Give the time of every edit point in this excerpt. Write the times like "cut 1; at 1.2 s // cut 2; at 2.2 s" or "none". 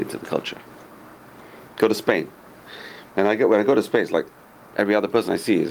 none